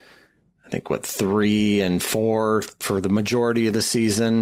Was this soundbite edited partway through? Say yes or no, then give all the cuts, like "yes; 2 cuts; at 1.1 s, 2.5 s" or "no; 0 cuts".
no; 0 cuts